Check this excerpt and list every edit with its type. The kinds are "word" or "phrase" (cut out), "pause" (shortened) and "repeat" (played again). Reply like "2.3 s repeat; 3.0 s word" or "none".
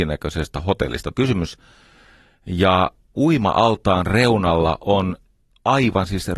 1.1 s phrase; 3.1 s word

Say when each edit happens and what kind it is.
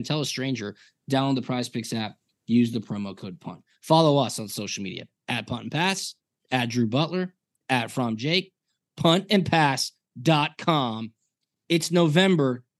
none

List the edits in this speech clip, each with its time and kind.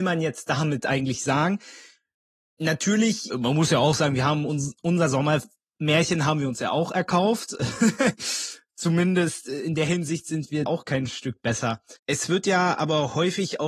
3.3 s word; 10.7 s word; 12.0 s pause

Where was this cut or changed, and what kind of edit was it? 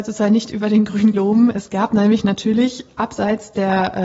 1.1 s word

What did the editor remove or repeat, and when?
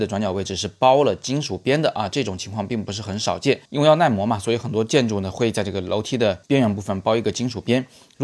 3.6 s pause; 6.4 s pause

